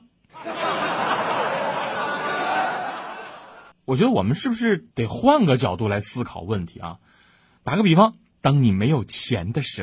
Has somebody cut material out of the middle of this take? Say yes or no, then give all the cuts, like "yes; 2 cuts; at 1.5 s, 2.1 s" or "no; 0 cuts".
yes; 3 cuts; at 3.7 s, 4.9 s, 8.3 s